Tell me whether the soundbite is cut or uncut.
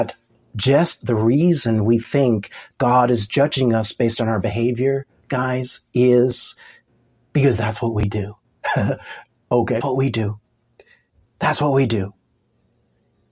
cut